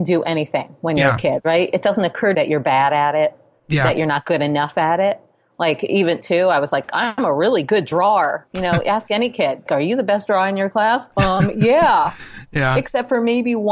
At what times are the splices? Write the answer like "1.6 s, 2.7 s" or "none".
2.3 s, 6.2 s, 9.7 s